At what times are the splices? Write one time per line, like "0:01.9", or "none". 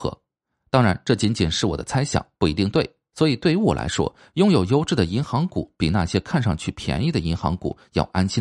none